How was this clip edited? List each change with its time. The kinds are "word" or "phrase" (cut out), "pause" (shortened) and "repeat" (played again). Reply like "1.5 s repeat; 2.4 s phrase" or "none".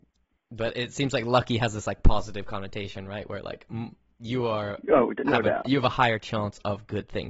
none

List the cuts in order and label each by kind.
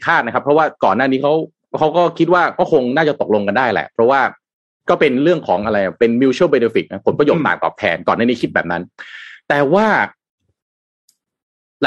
none

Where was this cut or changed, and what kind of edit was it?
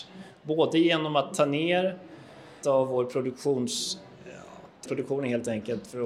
2.6 s word; 4.9 s word

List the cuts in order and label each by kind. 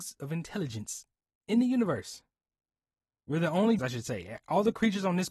3.8 s word

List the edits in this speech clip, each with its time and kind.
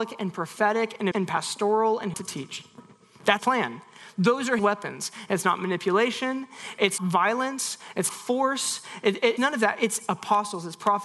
1.1 s word; 2.1 s word; 3.4 s word; 4.6 s word; 7.0 s word; 8.1 s word; 9.4 s word

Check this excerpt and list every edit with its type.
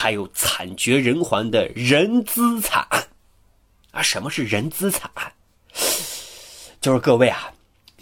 none

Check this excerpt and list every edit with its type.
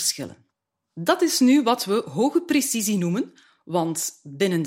none

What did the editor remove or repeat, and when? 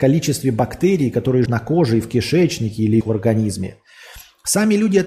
1.5 s word; 3.0 s phrase

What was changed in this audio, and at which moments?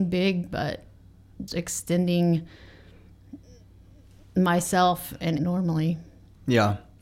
1.5 s word; 5.4 s phrase

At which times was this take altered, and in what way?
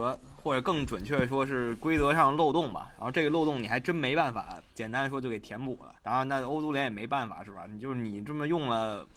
4.7 s pause; 6.0 s pause

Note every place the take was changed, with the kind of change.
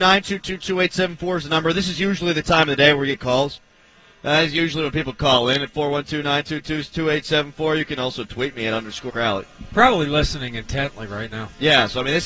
9.1 s word

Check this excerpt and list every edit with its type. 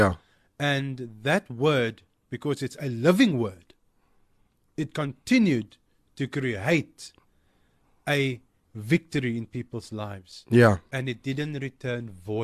none

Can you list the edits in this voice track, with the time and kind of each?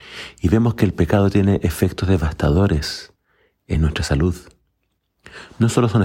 none

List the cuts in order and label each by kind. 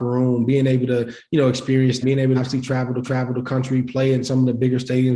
2.0 s word; 2.3 s phrase; 3.0 s repeat

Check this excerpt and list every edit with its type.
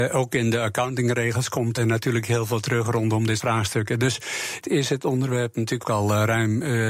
1.8 s word; 3.4 s word; 4.6 s word; 5.8 s word

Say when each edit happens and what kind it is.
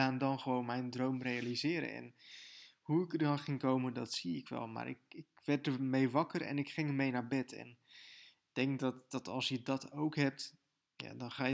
none

